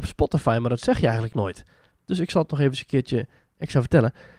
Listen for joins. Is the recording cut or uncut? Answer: uncut